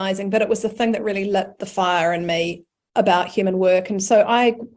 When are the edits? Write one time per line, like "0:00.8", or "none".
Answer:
none